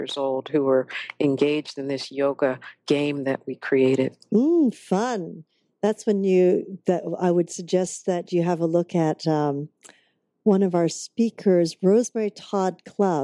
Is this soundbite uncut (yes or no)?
yes